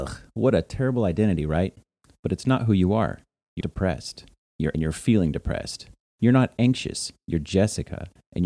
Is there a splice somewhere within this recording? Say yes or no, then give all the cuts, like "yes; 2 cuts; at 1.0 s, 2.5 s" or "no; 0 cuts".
yes; 2 cuts; at 3.6 s, 4.7 s